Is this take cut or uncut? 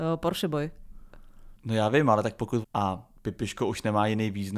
cut